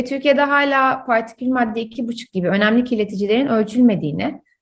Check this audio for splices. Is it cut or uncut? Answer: uncut